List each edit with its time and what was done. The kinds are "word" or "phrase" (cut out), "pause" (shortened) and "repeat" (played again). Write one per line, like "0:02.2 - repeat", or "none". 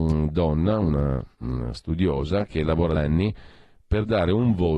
0:03.0 - word